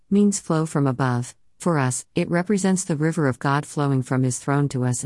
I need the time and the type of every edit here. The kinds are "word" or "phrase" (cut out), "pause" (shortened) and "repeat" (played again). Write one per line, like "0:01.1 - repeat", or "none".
none